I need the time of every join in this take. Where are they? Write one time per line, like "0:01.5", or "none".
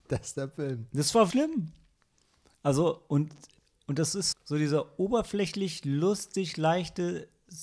0:01.3
0:04.3